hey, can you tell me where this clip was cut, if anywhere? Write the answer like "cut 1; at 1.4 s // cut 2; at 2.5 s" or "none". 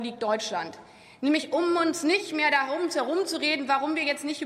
none